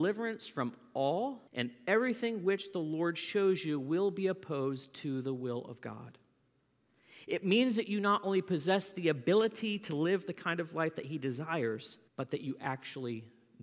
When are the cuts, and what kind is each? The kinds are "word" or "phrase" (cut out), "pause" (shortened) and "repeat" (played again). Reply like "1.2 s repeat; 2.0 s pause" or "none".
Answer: 1.5 s pause; 12.1 s pause